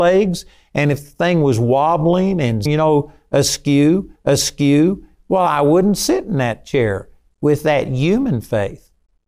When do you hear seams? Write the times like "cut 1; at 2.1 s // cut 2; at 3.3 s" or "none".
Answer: cut 1; at 2.7 s // cut 2; at 4.2 s